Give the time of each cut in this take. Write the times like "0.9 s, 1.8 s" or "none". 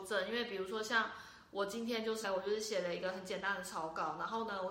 2.2 s